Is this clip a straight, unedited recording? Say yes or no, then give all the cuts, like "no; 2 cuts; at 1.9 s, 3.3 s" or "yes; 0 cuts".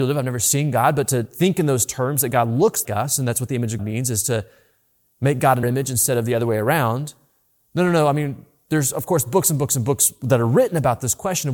no; 3 cuts; at 2.8 s, 3.8 s, 5.6 s